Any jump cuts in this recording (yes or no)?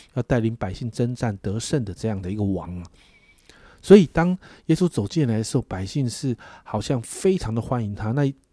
no